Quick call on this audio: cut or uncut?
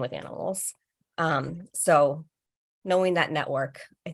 uncut